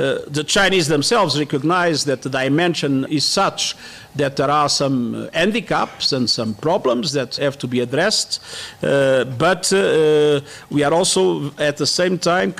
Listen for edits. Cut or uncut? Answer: cut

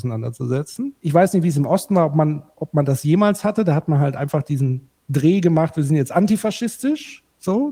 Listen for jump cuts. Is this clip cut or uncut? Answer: cut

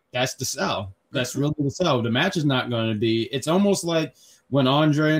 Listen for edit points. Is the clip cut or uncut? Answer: uncut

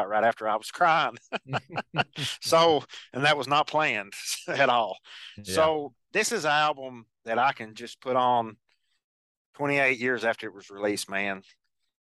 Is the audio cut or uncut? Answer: uncut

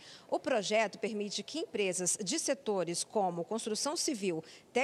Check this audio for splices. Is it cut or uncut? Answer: uncut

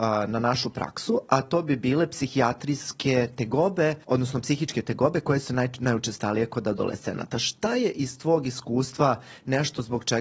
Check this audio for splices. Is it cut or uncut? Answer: cut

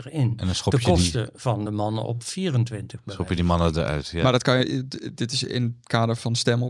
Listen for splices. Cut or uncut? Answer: uncut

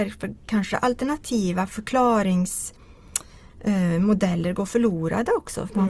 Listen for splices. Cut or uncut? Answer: uncut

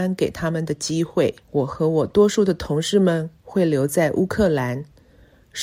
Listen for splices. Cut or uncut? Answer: cut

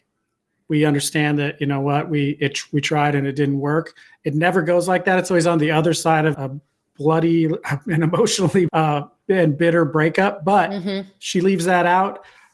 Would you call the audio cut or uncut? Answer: cut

